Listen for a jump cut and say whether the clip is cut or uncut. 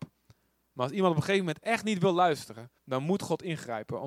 cut